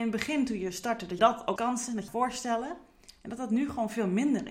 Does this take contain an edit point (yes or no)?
yes